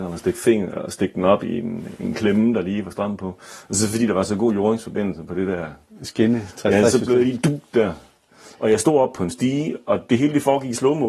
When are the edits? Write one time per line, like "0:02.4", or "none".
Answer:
none

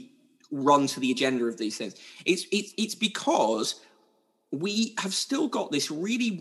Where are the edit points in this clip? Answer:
none

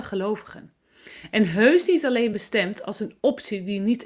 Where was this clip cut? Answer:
none

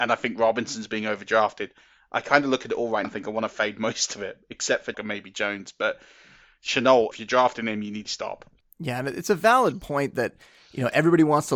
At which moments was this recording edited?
0:03.0
0:04.9
0:07.1
0:08.1

